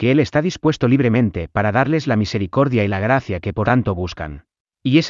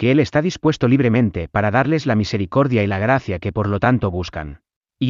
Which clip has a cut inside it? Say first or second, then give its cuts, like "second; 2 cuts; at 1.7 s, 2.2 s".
first; 1 cut; at 3.6 s